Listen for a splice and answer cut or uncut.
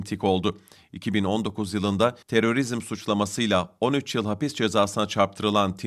cut